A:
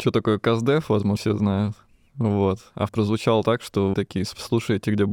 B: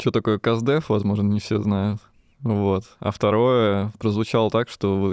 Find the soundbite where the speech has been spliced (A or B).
A